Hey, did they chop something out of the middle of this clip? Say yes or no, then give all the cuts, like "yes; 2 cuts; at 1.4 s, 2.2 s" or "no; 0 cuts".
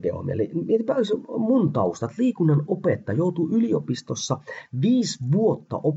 no; 0 cuts